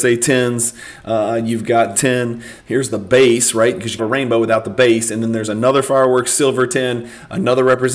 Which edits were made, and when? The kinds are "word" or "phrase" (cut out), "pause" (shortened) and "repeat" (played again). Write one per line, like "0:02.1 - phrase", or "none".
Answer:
0:01.9 - phrase
0:04.0 - phrase